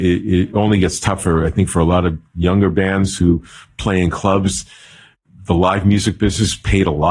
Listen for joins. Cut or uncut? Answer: uncut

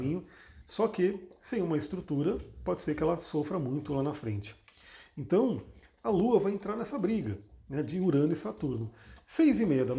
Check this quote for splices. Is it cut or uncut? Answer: uncut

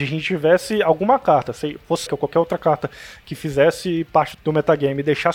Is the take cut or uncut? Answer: cut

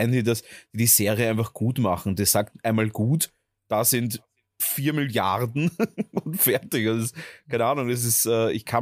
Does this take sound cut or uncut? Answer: uncut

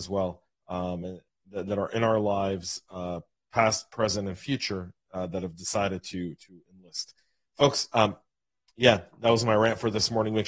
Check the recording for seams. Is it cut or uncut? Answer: uncut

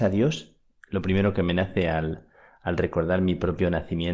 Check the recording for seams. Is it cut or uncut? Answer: uncut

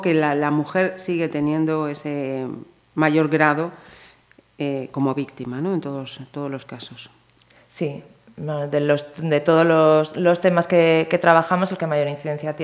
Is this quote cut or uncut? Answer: uncut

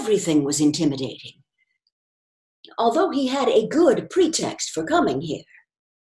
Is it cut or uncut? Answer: uncut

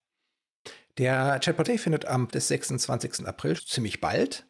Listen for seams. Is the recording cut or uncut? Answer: cut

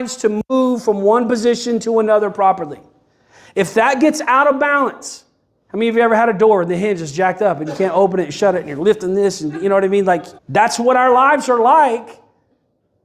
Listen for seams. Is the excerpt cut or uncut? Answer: cut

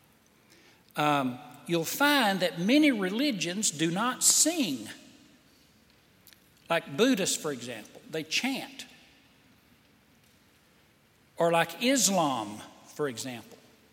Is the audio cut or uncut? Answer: uncut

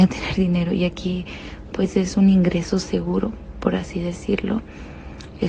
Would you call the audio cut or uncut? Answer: uncut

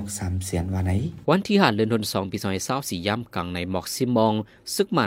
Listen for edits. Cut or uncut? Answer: cut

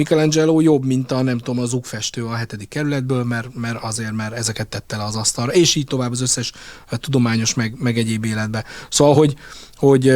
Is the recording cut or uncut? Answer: uncut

